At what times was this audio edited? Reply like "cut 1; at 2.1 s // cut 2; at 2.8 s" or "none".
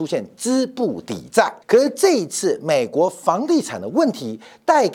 cut 1; at 1.6 s